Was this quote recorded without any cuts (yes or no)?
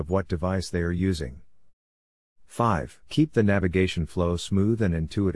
no